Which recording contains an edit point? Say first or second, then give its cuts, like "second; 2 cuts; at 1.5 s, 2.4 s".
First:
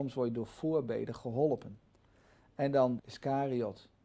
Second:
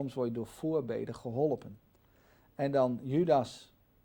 first; 1 cut; at 3.0 s